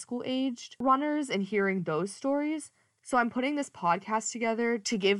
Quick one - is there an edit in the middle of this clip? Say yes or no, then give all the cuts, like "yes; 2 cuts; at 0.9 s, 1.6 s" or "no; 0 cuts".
no; 0 cuts